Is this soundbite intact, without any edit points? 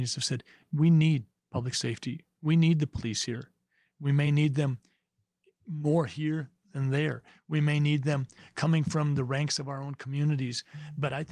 yes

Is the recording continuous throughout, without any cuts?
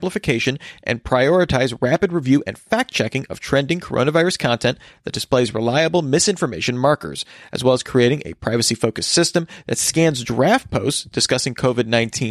yes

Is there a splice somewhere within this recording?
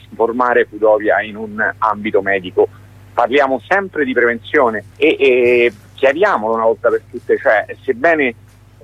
yes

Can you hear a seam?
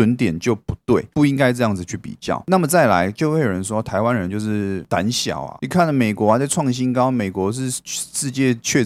yes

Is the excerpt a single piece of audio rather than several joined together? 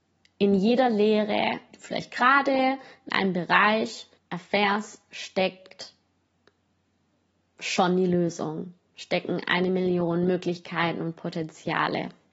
no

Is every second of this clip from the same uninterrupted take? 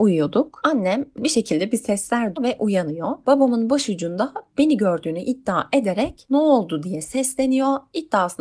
no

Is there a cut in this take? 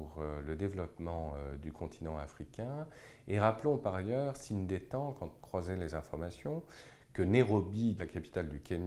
yes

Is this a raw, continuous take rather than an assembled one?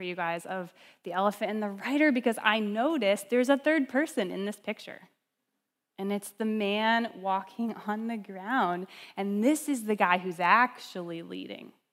yes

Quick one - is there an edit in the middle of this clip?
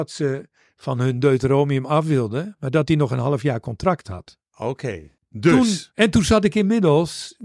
yes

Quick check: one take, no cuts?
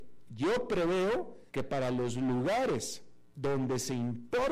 no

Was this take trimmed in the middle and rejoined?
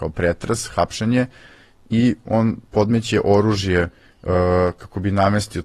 no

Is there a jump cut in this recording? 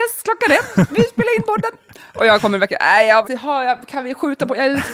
yes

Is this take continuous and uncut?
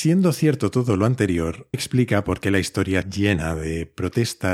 no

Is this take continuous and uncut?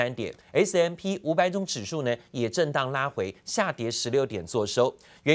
yes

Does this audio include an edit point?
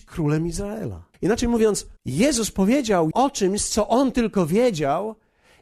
yes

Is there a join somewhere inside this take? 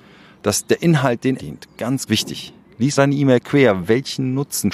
yes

